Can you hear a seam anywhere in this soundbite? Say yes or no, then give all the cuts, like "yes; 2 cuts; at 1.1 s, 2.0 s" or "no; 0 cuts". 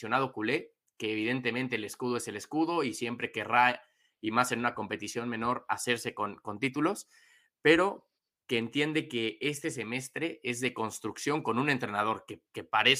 no; 0 cuts